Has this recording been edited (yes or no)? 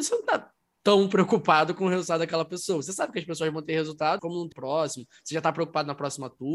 yes